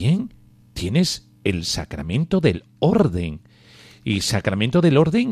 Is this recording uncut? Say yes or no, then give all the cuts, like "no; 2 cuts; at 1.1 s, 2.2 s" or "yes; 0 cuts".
yes; 0 cuts